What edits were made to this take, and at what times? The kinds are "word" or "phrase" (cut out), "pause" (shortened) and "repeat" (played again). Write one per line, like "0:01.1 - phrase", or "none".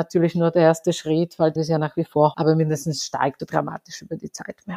0:01.6 - word
0:02.3 - word
0:03.4 - word

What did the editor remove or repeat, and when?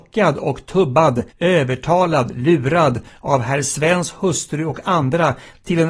0:01.3 - pause

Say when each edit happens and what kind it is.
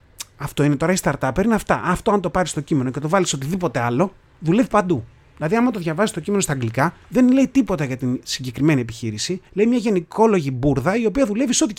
none

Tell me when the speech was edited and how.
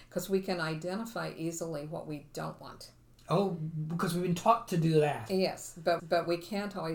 0:06.0 - repeat

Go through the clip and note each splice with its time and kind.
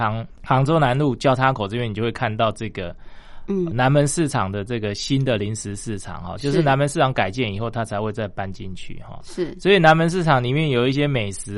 0:03.7 - word

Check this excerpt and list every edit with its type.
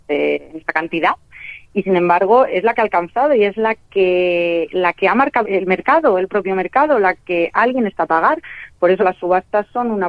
0:05.4 - word
0:08.0 - word
0:09.0 - word

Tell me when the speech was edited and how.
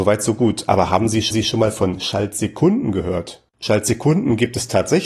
0:01.3 - repeat
0:03.5 - pause

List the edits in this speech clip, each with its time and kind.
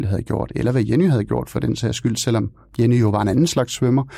none

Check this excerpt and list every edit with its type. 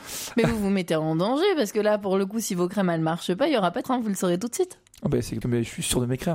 0:03.8 - word
0:05.4 - word

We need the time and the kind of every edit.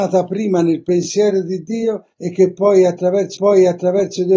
0:02.1 - pause
0:03.4 - repeat

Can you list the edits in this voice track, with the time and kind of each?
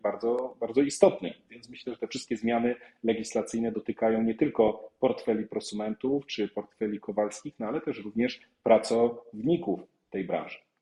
none

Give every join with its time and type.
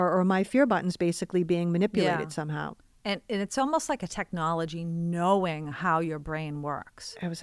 none

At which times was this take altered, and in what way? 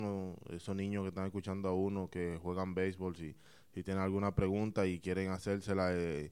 none

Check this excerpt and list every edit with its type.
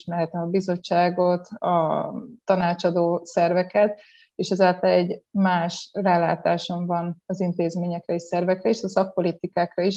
none

